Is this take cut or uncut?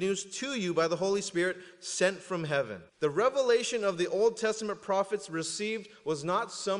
cut